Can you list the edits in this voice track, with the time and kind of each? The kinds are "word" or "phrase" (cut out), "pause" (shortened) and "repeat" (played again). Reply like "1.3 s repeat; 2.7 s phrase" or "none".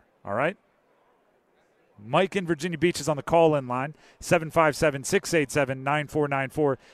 none